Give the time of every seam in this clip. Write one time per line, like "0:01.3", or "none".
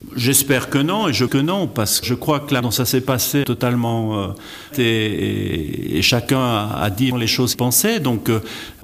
0:01.3
0:02.0
0:02.6
0:03.4
0:04.7
0:07.1
0:07.5

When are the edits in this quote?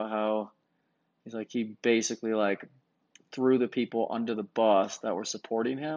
0:03.1

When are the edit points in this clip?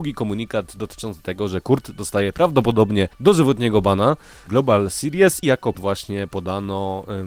0:03.1
0:04.5
0:05.4
0:05.7

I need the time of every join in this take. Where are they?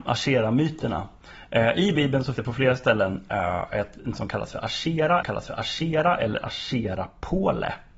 0:02.4
0:04.1
0:05.2

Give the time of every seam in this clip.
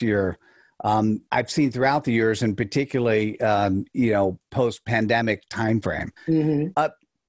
0:01.3
0:06.2

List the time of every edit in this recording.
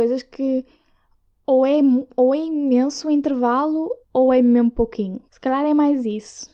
0:04.0
0:05.3

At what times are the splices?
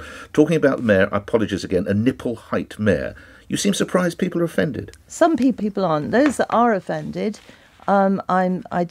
0:05.6

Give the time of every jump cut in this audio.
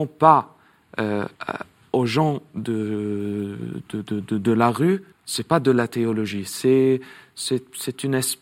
0:01.3
0:05.1

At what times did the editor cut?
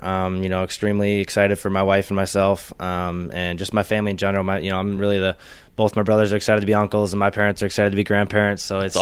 none

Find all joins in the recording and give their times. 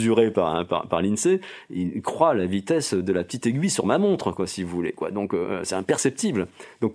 none

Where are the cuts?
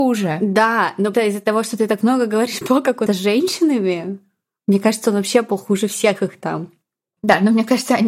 0:01.1
0:02.6
0:03.1

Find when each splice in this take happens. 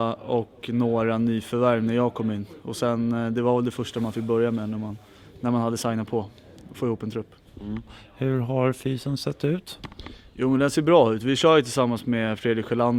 none

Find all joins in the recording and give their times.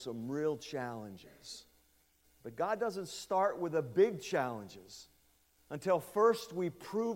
none

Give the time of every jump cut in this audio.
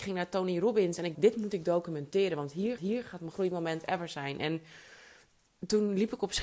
0:01.1
0:02.8
0:03.3

